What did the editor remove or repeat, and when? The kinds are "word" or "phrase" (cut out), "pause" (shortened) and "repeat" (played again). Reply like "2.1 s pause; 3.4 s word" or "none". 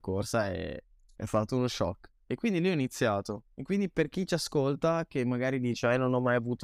2.2 s pause